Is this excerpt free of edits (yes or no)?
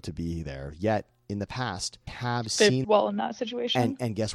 no